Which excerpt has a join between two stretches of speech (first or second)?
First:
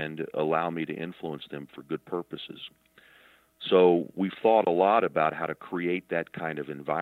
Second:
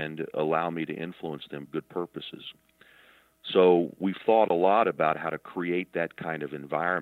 second